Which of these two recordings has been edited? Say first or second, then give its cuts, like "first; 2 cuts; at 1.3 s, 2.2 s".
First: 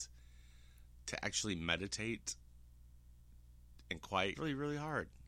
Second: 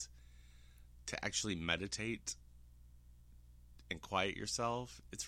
first; 1 cut; at 4.3 s